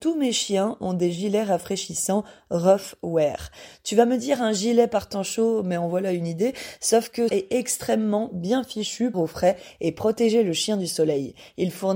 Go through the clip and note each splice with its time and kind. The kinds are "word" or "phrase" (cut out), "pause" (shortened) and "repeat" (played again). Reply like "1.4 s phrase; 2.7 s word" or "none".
7.3 s word; 9.1 s phrase